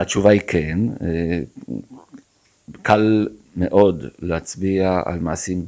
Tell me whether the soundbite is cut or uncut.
uncut